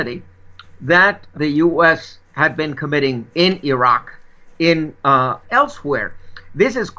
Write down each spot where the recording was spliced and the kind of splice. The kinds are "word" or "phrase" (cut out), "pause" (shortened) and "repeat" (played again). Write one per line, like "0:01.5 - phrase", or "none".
0:01.3 - word
0:03.3 - pause
0:05.4 - phrase